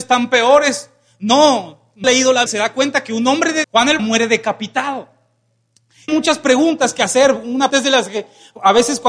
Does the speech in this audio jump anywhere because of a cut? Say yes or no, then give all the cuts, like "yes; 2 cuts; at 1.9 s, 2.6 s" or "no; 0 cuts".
yes; 6 cuts; at 2.0 s, 2.5 s, 3.6 s, 4.0 s, 6.1 s, 7.7 s